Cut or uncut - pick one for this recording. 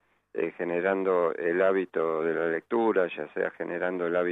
uncut